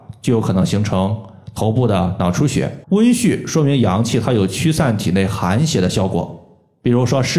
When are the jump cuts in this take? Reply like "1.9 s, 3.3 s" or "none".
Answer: 2.8 s